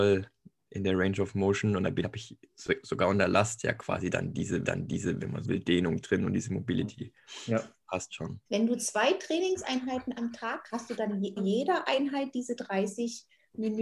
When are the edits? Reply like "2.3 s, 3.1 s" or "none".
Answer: 2.0 s, 4.6 s, 5.4 s, 8.5 s, 10.7 s, 11.4 s